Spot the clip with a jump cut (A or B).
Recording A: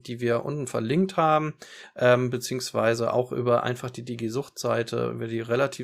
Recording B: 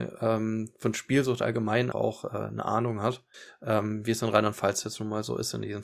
B